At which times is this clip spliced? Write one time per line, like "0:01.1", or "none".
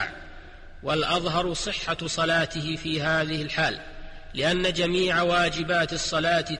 none